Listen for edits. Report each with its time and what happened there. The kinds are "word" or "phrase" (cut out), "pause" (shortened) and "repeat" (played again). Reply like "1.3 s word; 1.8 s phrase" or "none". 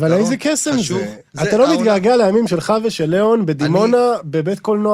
1.3 s pause